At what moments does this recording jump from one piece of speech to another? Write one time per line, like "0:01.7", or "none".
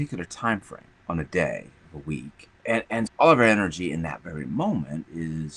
0:01.0
0:02.6
0:03.1